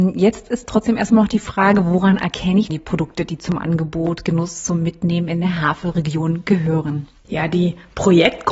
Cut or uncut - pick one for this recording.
cut